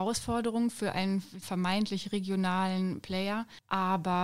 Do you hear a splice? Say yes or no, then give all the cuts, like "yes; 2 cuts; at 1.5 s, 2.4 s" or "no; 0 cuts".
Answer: yes; 1 cut; at 1.4 s